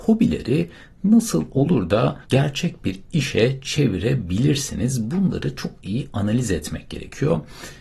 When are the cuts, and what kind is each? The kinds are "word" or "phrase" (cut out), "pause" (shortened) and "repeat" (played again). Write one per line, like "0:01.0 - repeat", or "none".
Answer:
0:02.2 - pause